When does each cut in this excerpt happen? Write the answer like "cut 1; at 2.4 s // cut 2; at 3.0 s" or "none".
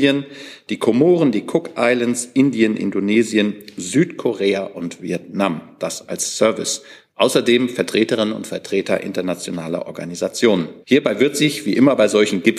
cut 1; at 10.8 s